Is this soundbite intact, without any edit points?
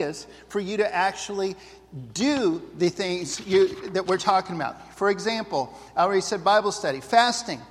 yes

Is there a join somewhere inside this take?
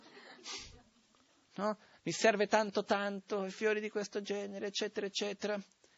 no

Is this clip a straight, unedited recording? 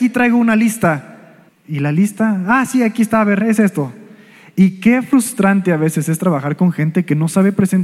no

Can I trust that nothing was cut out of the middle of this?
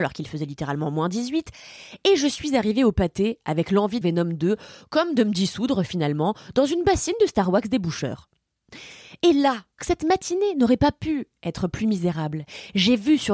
no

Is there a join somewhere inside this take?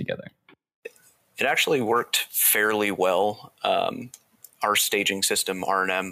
no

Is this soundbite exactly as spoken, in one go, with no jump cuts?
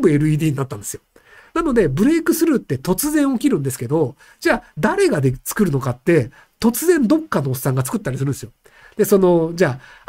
yes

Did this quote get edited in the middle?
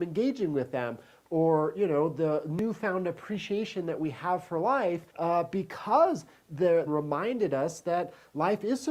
yes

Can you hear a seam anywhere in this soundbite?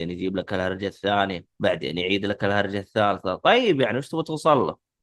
yes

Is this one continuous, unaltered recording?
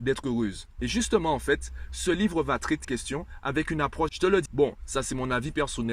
no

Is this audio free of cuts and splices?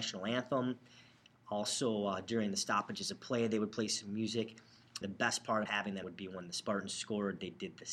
no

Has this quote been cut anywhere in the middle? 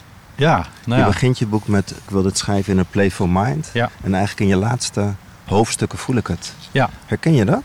yes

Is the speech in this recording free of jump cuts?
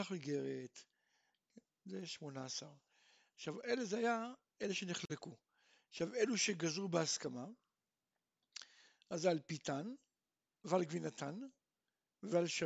yes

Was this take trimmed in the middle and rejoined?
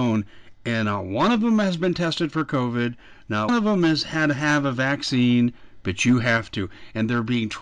yes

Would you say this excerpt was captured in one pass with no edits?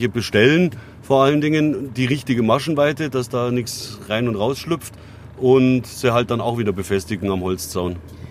yes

